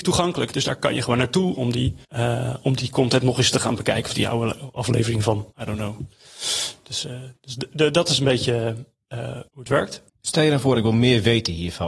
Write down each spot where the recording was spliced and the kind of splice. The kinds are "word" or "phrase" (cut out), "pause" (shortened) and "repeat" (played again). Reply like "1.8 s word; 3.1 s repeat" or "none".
2.0 s pause; 5.5 s pause; 9.5 s pause; 10.1 s pause